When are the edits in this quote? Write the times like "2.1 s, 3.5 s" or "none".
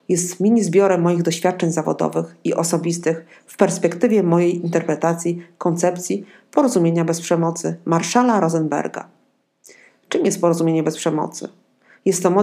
none